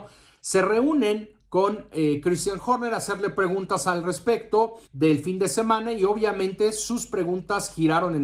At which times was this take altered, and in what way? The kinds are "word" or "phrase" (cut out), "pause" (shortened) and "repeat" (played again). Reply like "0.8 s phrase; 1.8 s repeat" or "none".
4.9 s pause